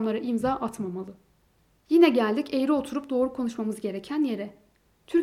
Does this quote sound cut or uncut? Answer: uncut